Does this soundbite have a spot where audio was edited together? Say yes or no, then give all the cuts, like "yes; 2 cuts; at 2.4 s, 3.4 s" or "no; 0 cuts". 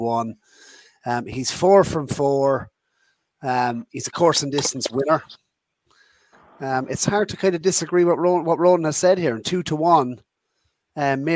no; 0 cuts